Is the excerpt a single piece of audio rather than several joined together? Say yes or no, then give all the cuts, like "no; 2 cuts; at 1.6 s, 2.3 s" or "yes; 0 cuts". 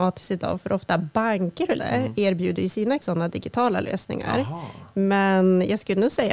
no; 2 cuts; at 1.8 s, 3.0 s